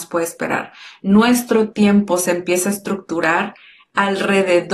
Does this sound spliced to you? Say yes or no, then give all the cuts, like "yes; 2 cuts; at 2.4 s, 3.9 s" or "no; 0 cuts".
no; 0 cuts